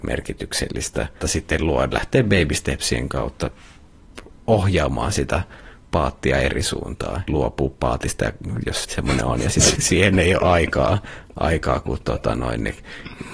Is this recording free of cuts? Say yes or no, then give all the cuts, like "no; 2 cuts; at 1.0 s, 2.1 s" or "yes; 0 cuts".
no; 6 cuts; at 1.2 s, 1.9 s, 4.3 s, 7.3 s, 8.8 s, 9.8 s